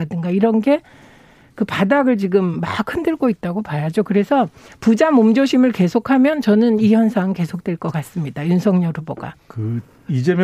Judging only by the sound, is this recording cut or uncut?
uncut